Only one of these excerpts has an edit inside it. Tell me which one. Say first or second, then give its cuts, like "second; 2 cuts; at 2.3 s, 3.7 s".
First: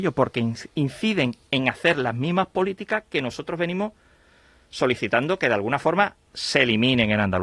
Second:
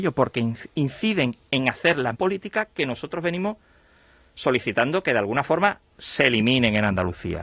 second; 1 cut; at 2.1 s